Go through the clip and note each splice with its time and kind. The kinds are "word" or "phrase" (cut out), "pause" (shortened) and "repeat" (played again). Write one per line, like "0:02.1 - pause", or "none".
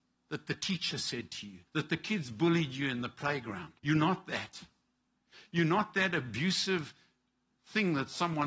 0:01.7 - pause
0:03.8 - pause